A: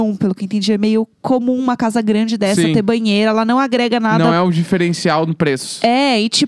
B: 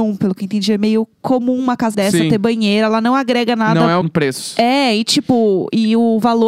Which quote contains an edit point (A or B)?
B